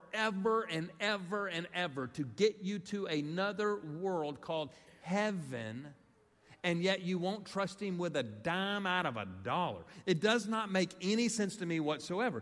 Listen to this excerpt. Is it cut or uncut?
uncut